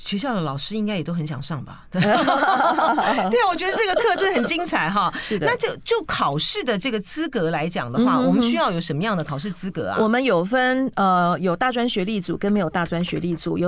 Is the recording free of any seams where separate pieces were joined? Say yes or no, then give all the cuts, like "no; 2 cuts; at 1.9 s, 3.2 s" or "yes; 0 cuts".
yes; 0 cuts